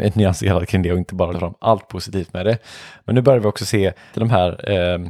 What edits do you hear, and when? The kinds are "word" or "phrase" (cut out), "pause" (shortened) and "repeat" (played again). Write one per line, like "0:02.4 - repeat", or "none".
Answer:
0:01.3 - word
0:04.1 - word